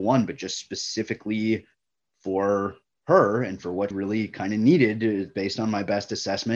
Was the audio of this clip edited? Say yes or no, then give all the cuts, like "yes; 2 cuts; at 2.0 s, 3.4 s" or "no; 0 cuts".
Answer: yes; 1 cut; at 3.9 s